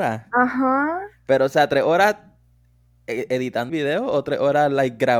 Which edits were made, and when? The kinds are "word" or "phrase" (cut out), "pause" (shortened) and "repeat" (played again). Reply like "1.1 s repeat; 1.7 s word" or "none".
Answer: 3.7 s word